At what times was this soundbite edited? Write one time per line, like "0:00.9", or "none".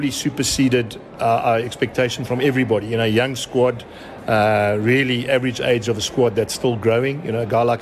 none